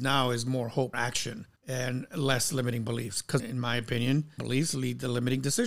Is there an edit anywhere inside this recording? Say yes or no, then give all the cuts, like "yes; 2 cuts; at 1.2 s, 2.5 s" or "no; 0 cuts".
yes; 4 cuts; at 0.9 s, 1.6 s, 3.4 s, 4.4 s